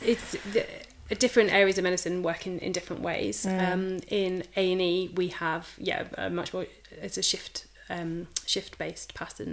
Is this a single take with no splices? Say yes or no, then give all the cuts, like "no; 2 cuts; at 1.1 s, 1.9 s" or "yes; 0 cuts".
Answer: yes; 0 cuts